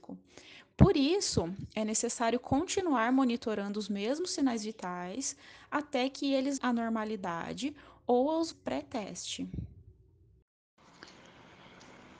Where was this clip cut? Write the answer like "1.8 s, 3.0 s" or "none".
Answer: 6.6 s, 8.5 s